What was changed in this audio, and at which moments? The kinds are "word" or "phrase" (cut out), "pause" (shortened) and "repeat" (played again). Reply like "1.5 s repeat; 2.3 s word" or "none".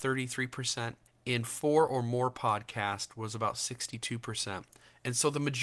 none